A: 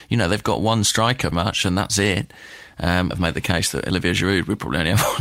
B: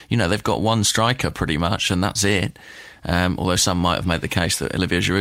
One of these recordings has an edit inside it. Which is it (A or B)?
A